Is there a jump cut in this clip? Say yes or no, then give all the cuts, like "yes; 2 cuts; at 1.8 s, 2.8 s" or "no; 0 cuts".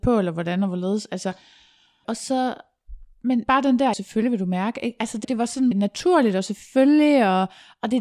yes; 5 cuts; at 2.0 s, 3.4 s, 3.9 s, 5.2 s, 5.7 s